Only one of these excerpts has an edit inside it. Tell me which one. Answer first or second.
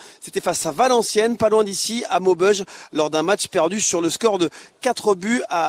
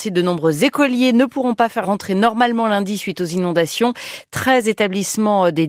second